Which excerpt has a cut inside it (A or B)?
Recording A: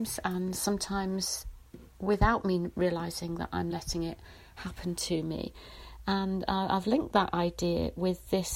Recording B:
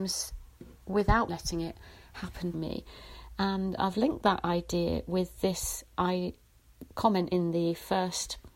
B